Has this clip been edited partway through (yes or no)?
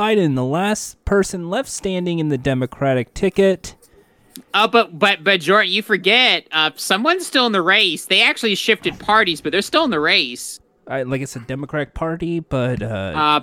no